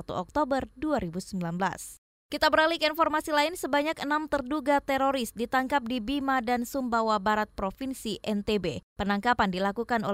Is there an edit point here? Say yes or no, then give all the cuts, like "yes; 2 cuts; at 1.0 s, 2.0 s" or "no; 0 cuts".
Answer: yes; 1 cut; at 2.1 s